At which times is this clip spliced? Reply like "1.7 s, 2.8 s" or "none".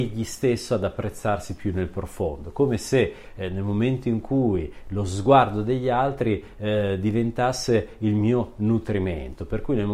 none